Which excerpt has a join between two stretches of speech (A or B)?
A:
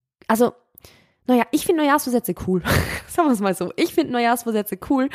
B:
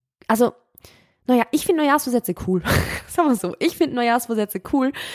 B